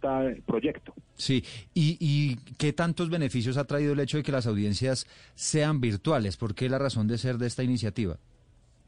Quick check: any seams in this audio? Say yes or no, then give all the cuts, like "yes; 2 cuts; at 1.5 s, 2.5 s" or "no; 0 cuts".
no; 0 cuts